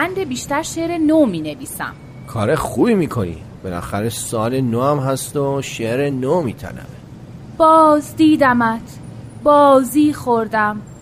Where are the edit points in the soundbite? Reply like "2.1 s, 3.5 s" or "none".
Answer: none